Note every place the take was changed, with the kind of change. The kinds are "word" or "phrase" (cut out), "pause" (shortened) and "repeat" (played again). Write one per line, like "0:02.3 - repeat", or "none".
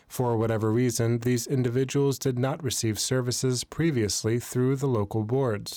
none